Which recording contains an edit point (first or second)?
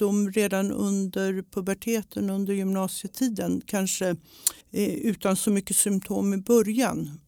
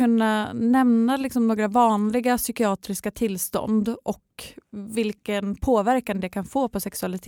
first